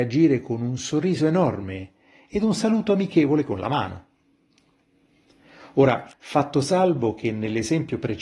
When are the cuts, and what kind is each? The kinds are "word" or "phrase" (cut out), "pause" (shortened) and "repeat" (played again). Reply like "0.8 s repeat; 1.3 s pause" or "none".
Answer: 6.1 s pause

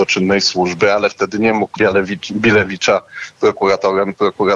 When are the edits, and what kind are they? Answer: 1.8 s word

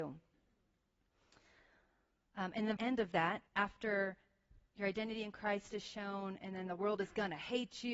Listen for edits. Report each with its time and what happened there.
2.8 s word; 3.5 s pause

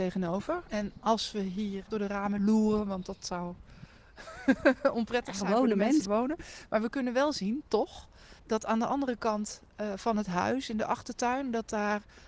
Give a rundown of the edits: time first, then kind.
1.9 s phrase; 6.0 s word; 8.4 s pause

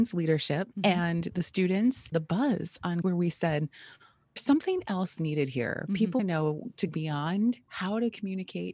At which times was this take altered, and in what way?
2.1 s word; 3.0 s word; 4.4 s word; 5.2 s word; 6.2 s word; 6.9 s word

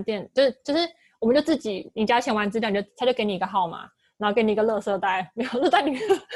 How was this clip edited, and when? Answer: none

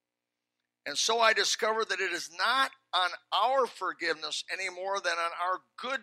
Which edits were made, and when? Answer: none

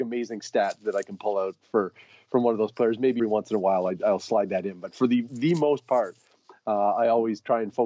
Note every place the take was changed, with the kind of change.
3.2 s word

